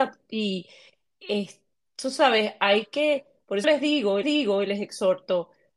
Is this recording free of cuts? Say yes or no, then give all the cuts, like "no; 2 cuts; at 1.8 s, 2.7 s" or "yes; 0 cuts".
no; 2 cuts; at 3.6 s, 4.2 s